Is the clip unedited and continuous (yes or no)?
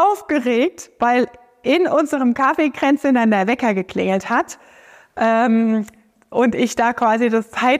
yes